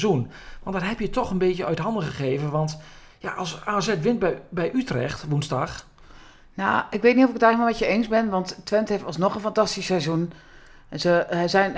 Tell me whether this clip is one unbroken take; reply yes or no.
yes